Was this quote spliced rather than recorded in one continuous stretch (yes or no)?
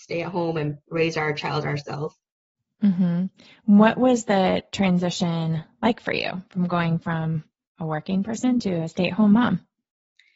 no